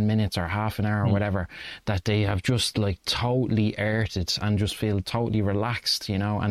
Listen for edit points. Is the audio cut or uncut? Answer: uncut